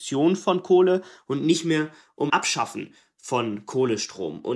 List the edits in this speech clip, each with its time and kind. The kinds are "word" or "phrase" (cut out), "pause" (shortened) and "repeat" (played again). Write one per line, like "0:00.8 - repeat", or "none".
0:02.3 - word